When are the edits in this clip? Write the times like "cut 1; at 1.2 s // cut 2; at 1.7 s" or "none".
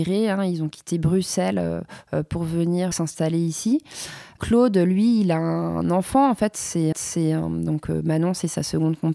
cut 1; at 2.9 s // cut 2; at 6.9 s